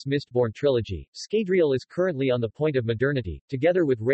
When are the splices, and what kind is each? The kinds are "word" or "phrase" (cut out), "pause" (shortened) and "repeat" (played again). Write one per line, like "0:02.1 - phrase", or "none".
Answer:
none